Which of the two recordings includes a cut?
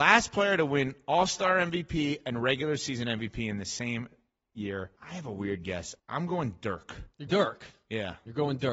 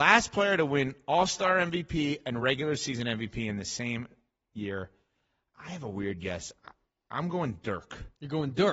first; 3 cuts; at 5.0 s, 6.0 s, 7.3 s

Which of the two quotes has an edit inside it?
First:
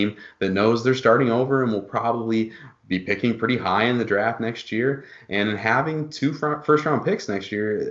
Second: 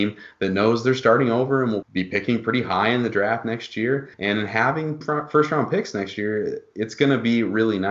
second; 3 cuts; at 1.8 s, 4.1 s, 5.0 s

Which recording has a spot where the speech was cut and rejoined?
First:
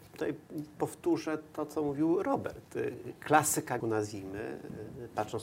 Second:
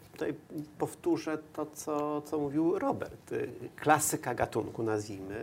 first; 2 cuts; at 1.7 s, 3.8 s

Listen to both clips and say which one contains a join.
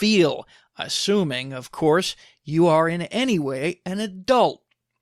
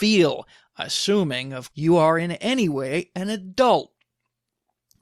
second; 1 cut; at 1.7 s

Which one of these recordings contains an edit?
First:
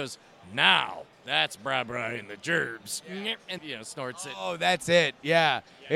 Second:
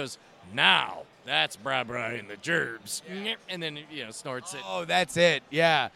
first; 1 cut; at 3.6 s

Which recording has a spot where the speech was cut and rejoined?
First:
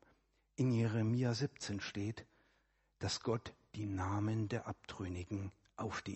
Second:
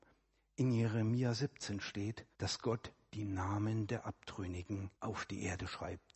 second; 2 cuts; at 2.3 s, 4.9 s

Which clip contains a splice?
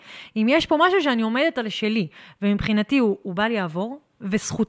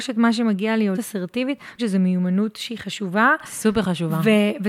second; 2 cuts; at 0.9 s, 1.8 s

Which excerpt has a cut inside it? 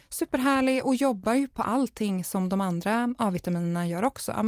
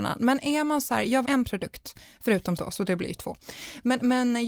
second; 2 cuts; at 1.2 s, 2.6 s

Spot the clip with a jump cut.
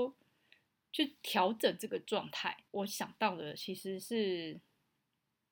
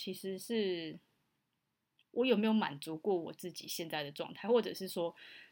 first; 1 cut; at 2.7 s

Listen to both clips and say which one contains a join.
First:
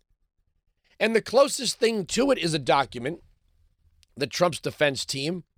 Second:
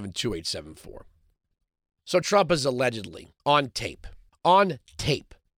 second; 3 cuts; at 2.2 s, 3.4 s, 4.3 s

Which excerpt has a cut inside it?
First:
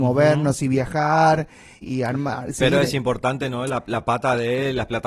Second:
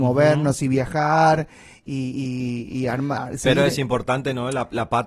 first; 1 cut; at 1.8 s

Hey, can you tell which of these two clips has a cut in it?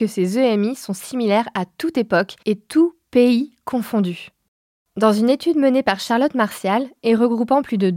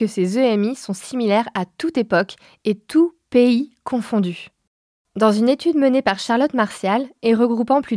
first; 1 cut; at 2.4 s

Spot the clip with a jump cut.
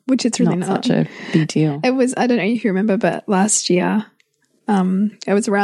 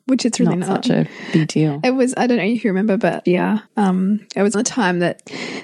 second; 3 cuts; at 3.3 s, 3.7 s, 4.5 s

